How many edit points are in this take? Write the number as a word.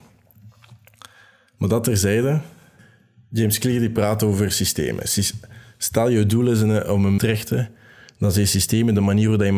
one